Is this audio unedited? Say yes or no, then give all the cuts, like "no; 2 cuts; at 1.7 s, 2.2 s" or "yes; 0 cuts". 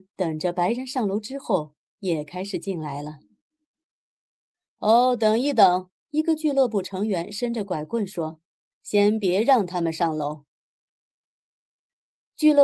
no; 2 cuts; at 6.0 s, 8.5 s